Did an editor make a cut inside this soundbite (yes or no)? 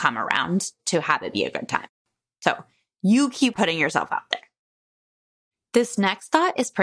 no